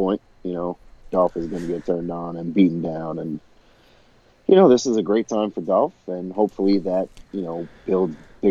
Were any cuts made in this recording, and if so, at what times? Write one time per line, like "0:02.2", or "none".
none